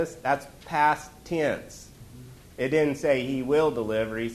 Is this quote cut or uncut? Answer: uncut